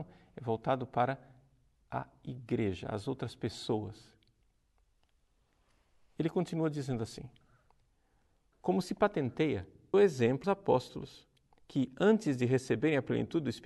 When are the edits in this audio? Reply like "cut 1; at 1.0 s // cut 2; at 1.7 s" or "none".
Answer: cut 1; at 9.9 s // cut 2; at 10.4 s